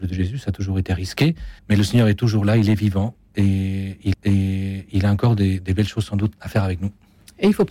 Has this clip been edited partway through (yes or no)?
yes